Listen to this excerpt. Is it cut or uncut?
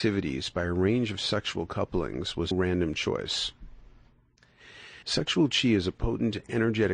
cut